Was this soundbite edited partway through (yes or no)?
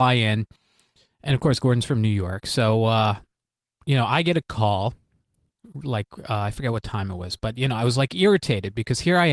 no